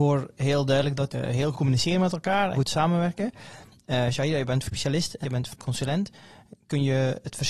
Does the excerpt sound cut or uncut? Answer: cut